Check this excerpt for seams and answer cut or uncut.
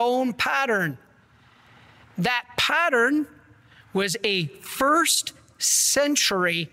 uncut